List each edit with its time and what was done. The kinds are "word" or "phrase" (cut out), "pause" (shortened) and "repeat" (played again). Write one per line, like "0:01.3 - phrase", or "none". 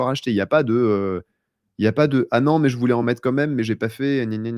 none